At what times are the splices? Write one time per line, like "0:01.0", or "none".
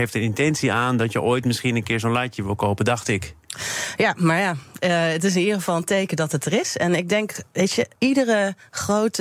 0:07.5
0:08.0